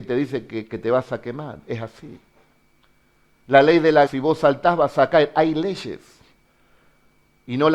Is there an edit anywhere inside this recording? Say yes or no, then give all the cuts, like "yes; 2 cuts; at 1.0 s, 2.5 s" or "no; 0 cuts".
yes; 1 cut; at 4.1 s